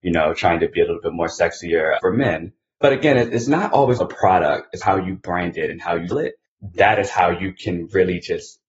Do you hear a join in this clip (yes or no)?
yes